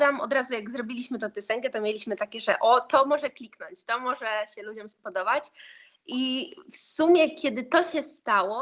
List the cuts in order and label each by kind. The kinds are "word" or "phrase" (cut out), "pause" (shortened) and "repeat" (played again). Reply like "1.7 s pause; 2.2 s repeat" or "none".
none